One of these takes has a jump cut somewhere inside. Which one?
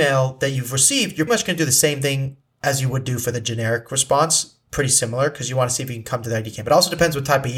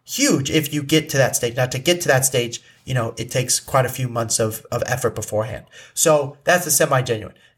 first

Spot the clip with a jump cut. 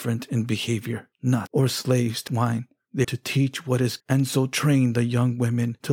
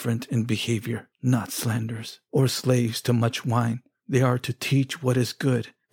first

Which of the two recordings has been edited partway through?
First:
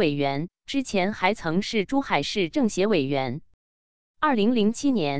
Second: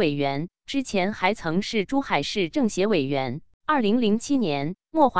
second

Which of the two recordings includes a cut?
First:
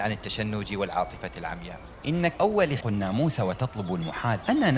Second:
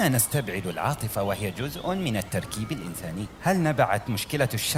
first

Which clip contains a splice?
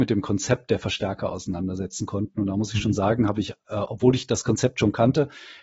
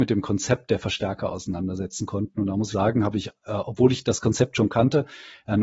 second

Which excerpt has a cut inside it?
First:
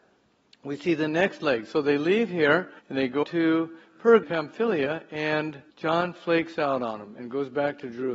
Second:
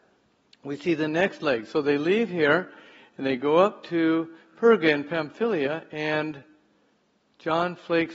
first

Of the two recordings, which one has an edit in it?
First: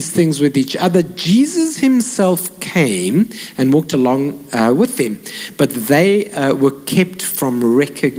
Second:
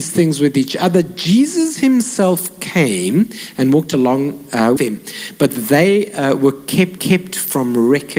second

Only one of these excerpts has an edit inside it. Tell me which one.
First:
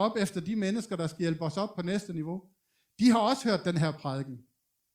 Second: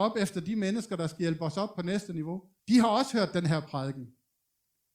second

